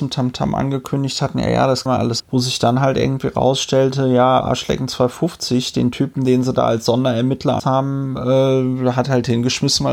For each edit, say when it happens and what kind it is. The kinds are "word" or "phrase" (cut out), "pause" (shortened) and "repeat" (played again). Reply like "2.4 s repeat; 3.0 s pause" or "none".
1.9 s word; 2.2 s word; 4.4 s word; 7.6 s word